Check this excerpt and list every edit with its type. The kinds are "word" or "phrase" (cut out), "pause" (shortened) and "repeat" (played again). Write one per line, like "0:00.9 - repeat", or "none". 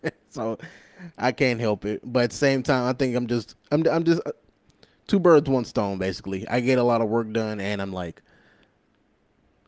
none